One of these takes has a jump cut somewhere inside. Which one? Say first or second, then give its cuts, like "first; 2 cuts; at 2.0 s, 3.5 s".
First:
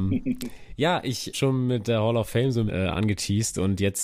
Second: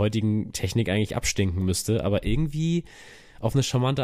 first; 2 cuts; at 1.3 s, 2.7 s